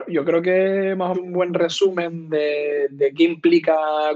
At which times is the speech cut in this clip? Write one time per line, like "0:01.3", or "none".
0:01.1

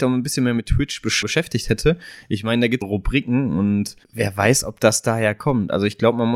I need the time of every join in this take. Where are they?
0:01.2
0:02.8
0:04.0

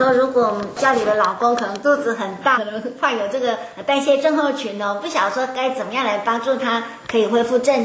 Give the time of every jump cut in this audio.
0:02.5

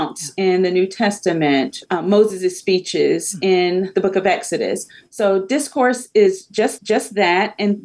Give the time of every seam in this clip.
0:01.9
0:06.8

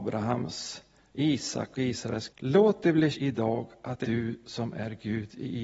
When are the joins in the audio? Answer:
0:01.7
0:02.3
0:03.1
0:04.0

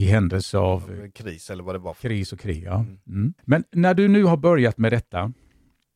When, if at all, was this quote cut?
0:03.4

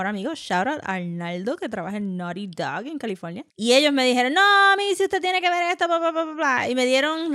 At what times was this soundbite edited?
0:03.5

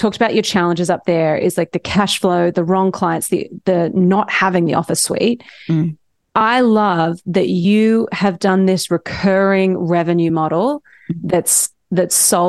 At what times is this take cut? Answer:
none

